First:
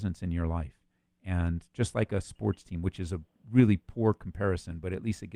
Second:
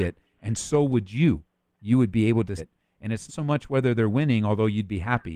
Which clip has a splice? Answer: second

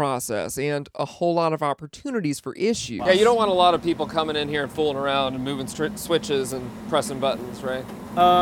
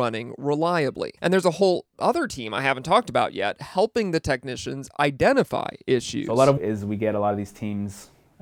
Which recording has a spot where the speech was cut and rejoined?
second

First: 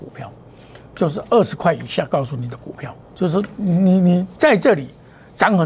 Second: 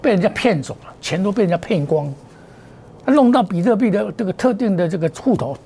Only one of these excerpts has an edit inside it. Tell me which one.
first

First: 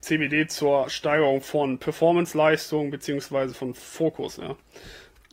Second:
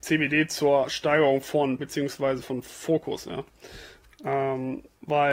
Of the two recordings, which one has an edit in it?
second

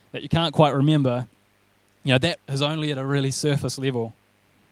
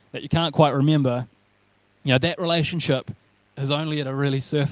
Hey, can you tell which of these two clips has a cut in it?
first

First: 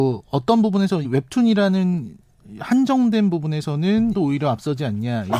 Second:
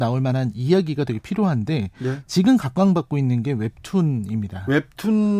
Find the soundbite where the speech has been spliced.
first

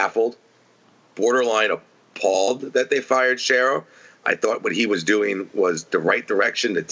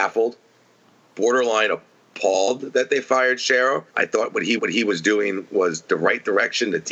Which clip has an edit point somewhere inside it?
second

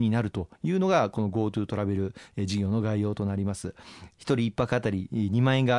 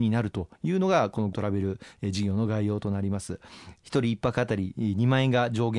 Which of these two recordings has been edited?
second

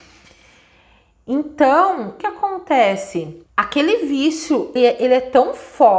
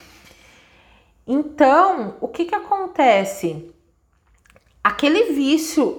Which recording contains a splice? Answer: first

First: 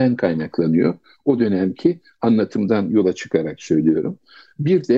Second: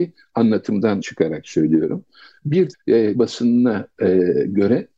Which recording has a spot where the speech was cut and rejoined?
second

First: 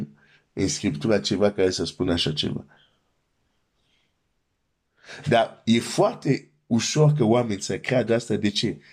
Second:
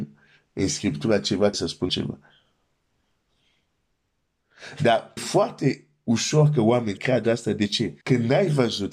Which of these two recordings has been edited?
second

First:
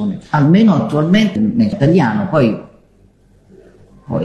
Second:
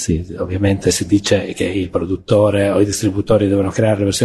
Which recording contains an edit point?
first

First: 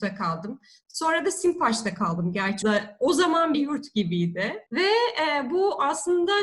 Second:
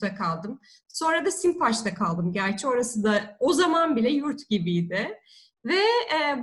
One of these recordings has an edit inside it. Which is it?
first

